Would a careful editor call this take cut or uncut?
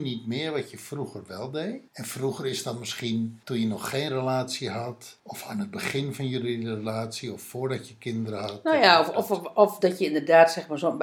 cut